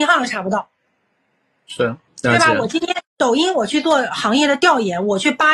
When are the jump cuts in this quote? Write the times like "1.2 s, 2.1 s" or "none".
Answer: 2.1 s, 3.0 s